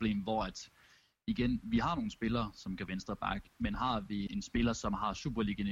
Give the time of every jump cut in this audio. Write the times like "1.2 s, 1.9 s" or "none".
2.9 s, 4.3 s

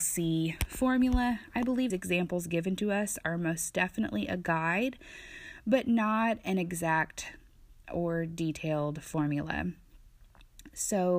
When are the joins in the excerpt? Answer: 1.9 s

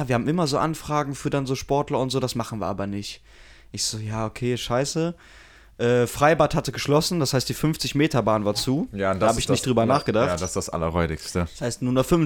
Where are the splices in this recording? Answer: none

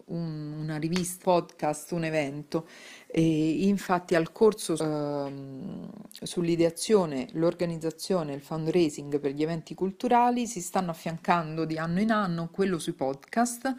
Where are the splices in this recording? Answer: 1.2 s, 4.8 s

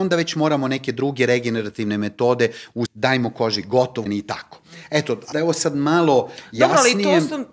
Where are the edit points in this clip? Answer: 2.9 s, 4.1 s, 5.3 s

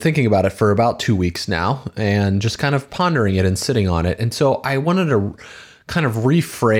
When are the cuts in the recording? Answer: none

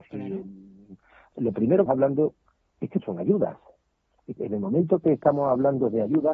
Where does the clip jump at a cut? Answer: 1.3 s, 1.9 s, 3.0 s, 4.4 s

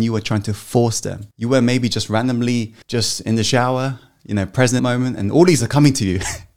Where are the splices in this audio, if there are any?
1.3 s, 2.8 s, 4.8 s, 5.6 s

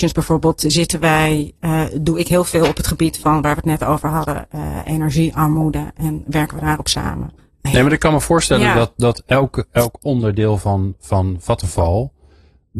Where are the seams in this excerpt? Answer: 7.4 s

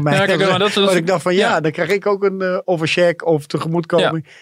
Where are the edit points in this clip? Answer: none

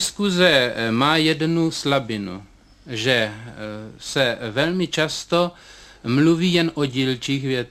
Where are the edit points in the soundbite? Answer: none

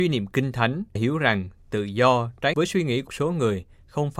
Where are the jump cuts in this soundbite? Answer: 1.0 s, 2.5 s, 3.1 s

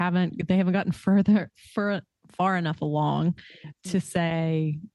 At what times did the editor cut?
2.3 s

